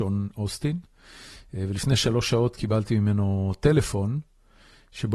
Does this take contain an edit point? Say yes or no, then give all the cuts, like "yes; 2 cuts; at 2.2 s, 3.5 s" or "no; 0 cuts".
no; 0 cuts